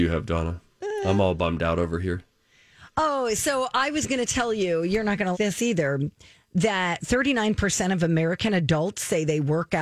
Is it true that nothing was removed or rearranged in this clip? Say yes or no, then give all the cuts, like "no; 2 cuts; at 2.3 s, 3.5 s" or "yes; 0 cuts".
no; 1 cut; at 5.3 s